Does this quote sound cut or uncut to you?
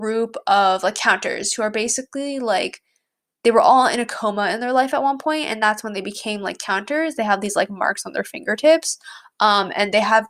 uncut